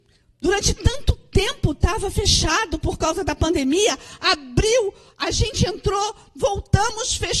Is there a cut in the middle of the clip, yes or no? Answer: no